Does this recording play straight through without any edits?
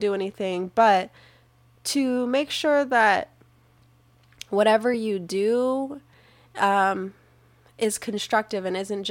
yes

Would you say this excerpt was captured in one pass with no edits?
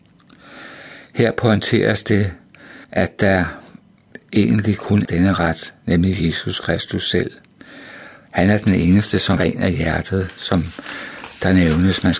no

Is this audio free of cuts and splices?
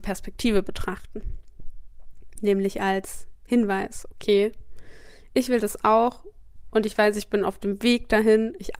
yes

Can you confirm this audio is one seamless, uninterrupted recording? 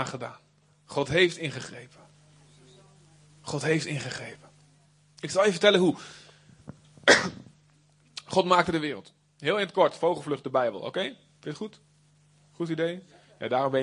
yes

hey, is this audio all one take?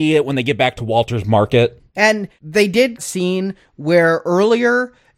no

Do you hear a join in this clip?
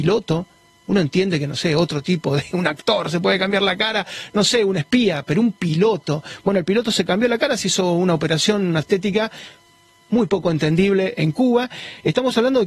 yes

